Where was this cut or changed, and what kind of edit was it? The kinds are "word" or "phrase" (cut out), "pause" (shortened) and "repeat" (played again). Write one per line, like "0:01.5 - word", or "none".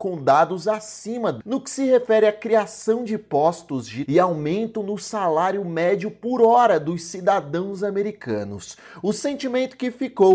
0:01.4 - word
0:04.1 - word